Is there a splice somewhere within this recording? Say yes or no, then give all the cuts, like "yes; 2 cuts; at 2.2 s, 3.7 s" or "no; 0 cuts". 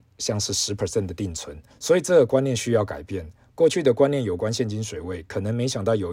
yes; 1 cut; at 1.7 s